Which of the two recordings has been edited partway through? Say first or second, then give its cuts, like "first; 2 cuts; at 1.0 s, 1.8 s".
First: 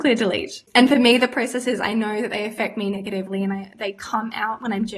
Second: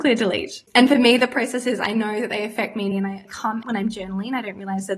second; 3 cuts; at 2.9 s, 3.2 s, 3.6 s